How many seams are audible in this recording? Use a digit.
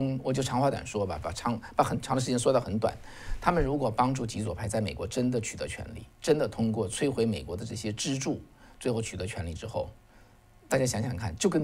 1